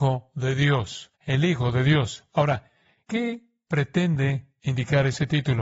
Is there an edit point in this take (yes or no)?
yes